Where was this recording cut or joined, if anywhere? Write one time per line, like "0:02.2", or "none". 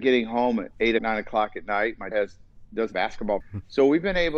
0:01.0
0:02.1
0:02.9
0:03.4